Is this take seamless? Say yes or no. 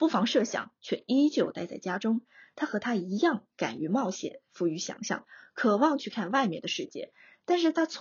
yes